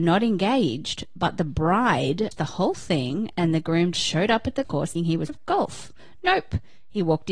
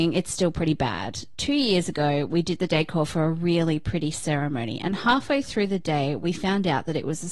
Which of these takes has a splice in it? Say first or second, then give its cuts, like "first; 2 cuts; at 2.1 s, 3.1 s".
first; 5 cuts; at 2.3 s, 3.9 s, 4.6 s, 5.0 s, 5.3 s